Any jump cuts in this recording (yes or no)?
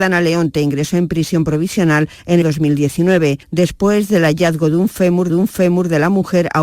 yes